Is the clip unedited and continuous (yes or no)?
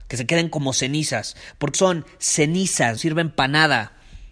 no